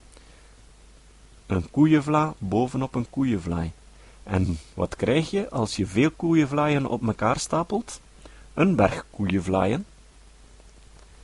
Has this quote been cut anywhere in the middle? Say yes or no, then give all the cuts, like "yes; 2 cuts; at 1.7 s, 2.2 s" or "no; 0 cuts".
no; 0 cuts